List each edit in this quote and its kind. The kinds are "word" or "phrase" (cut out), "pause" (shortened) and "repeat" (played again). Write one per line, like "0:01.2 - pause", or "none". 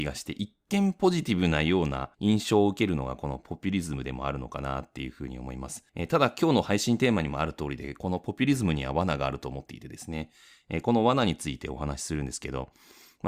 0:02.1 - pause
0:05.9 - pause